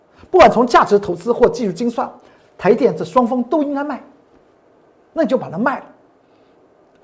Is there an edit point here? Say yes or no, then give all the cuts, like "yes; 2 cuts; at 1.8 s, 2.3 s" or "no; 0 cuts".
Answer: no; 0 cuts